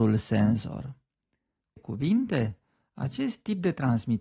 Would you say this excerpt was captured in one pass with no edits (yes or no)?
no